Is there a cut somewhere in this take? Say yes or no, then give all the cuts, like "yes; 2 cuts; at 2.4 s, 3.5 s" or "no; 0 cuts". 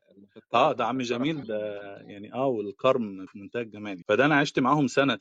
yes; 3 cuts; at 1.4 s, 3.3 s, 4.0 s